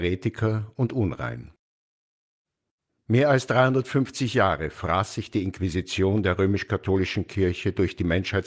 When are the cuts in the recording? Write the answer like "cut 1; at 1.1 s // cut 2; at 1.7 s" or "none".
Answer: none